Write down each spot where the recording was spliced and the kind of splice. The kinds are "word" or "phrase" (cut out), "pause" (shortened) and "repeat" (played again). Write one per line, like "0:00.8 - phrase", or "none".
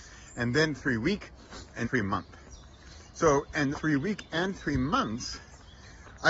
0:01.8 - word
0:03.7 - word